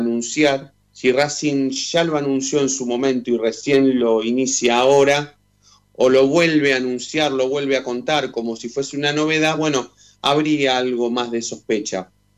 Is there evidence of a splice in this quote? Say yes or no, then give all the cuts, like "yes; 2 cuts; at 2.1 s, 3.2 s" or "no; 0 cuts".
no; 0 cuts